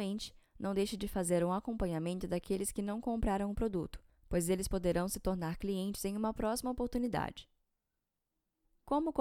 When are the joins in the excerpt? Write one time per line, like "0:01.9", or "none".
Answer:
none